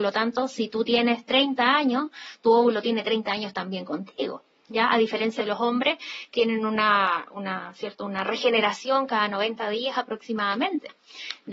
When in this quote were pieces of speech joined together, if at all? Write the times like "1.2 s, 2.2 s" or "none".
5.4 s, 6.3 s